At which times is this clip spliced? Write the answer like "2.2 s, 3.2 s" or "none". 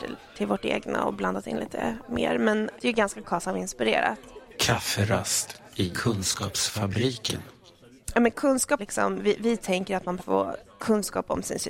2.8 s, 8.8 s, 10.2 s